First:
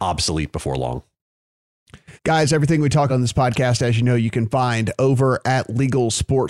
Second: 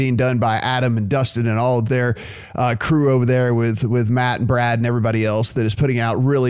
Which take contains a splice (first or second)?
first